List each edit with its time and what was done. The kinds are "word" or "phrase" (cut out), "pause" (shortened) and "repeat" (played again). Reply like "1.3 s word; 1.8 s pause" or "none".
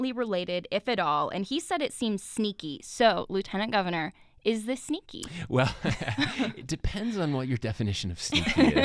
none